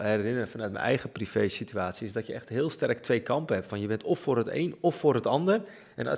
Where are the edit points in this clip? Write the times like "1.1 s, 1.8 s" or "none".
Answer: none